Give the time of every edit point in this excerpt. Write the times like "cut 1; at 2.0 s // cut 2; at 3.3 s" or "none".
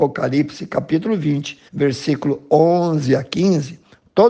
cut 1; at 1.7 s